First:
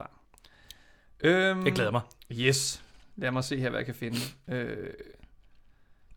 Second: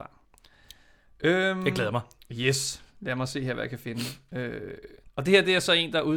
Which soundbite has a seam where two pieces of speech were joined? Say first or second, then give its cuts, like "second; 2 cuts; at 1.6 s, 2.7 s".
second; 2 cuts; at 2.9 s, 5.0 s